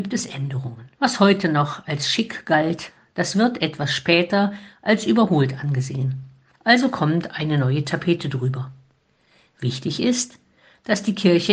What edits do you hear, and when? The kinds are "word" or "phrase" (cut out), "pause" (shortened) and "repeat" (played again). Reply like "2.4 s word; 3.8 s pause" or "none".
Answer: 0.9 s pause